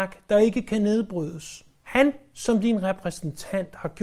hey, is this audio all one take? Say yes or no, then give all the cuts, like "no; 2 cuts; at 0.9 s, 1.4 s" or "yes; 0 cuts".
no; 1 cut; at 1.7 s